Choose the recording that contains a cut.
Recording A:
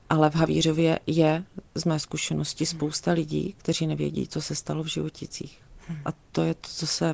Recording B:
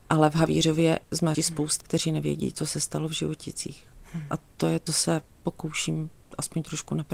B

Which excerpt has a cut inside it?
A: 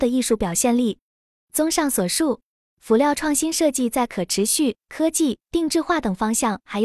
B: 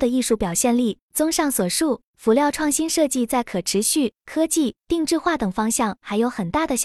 B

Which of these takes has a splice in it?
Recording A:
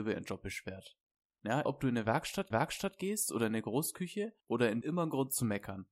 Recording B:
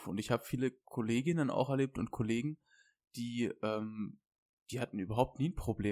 A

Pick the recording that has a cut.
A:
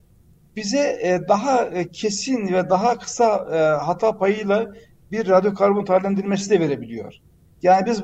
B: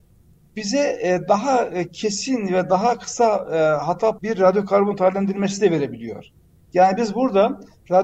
B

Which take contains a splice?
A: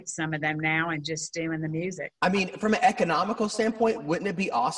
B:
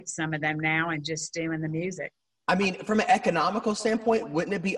A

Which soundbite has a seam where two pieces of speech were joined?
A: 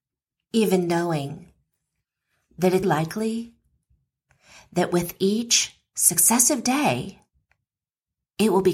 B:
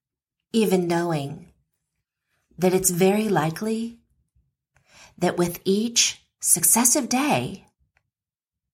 A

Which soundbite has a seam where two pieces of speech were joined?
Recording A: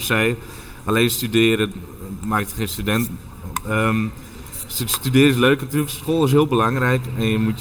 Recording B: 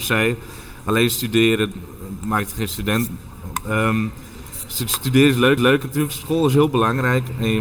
B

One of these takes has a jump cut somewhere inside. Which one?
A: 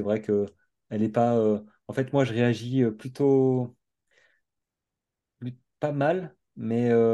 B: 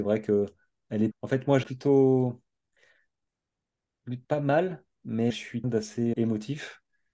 B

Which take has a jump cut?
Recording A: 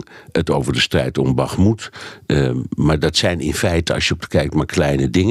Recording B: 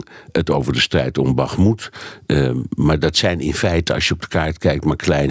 A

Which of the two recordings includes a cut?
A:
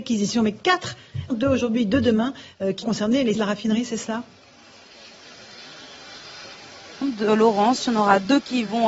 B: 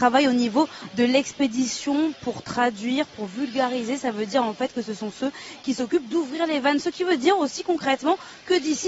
A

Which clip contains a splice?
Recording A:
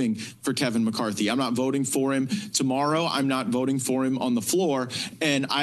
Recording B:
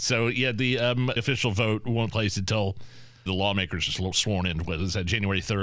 B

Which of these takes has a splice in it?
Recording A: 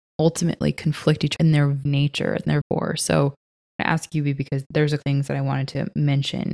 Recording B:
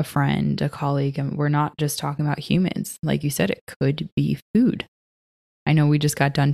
A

